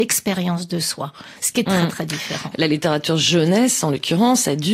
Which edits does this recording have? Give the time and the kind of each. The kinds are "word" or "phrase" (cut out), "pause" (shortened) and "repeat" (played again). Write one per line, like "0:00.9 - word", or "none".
0:01.4 - pause
0:01.7 - word